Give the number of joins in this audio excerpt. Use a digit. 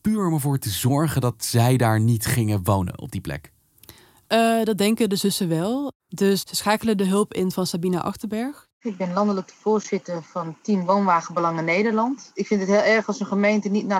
0